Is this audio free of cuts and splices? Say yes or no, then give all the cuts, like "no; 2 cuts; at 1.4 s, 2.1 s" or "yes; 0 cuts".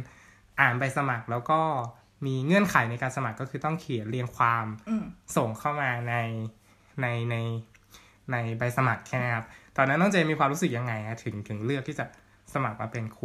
yes; 0 cuts